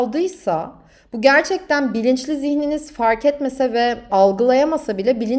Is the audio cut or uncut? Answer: cut